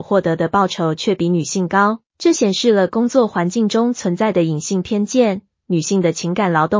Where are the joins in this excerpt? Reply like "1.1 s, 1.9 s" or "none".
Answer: 2.1 s